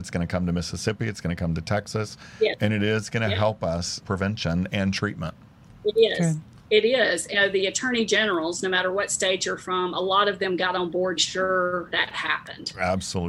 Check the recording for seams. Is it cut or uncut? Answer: cut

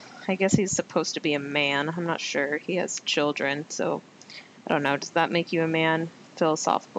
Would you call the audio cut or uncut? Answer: uncut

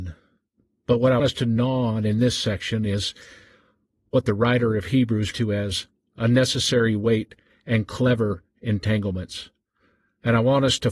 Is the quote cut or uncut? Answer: cut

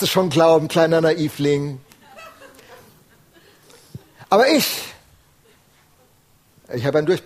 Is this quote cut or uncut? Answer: uncut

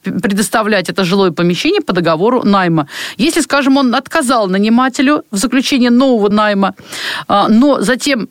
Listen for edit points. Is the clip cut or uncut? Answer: cut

